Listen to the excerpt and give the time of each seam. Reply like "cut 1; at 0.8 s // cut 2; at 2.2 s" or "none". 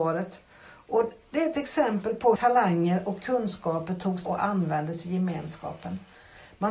cut 1; at 2.4 s // cut 2; at 4.3 s